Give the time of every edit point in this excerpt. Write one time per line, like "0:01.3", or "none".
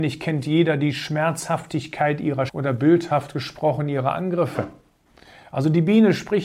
0:02.5